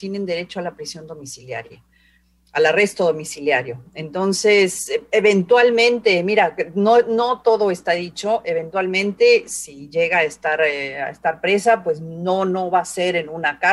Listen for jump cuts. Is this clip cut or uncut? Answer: uncut